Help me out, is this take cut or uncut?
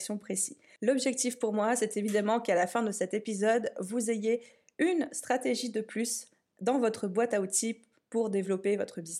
uncut